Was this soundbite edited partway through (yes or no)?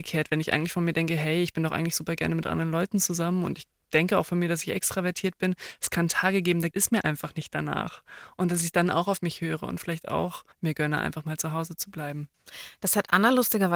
yes